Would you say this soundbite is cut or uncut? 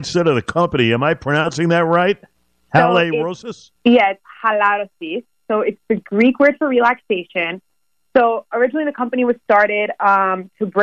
cut